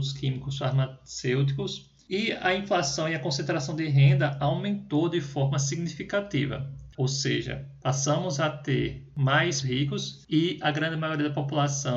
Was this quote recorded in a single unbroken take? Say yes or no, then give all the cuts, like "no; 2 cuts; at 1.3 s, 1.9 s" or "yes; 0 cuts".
no; 1 cut; at 9.6 s